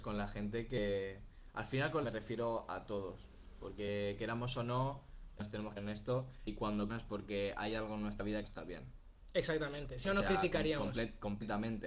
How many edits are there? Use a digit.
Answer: 5